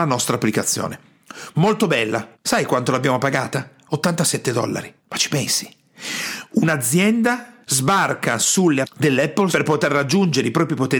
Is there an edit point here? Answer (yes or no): yes